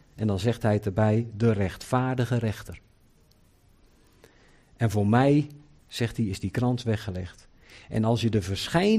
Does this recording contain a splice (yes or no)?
no